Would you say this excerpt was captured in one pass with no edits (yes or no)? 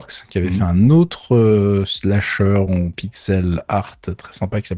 yes